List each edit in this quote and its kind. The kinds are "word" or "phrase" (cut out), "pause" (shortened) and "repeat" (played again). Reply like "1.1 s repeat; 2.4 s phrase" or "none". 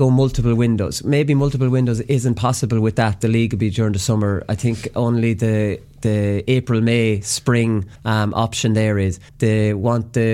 3.2 s word; 8.0 s pause; 9.3 s pause